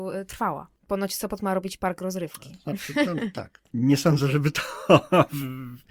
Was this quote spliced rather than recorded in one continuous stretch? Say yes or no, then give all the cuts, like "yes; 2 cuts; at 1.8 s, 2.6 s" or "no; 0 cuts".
no; 0 cuts